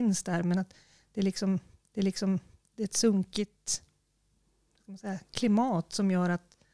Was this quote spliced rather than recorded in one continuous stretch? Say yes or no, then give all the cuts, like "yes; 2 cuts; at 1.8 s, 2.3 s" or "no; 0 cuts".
yes; 1 cut; at 1.9 s